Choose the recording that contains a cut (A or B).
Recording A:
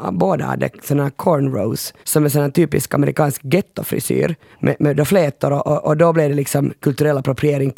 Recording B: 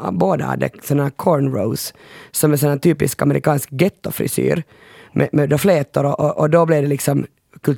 A